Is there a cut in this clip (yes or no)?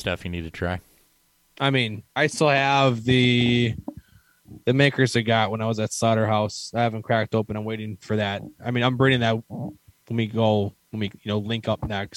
no